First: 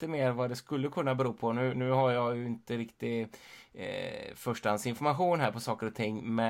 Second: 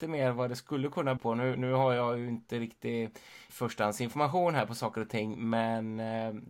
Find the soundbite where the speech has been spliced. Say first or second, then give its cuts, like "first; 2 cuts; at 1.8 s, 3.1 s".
second; 2 cuts; at 1.2 s, 3.5 s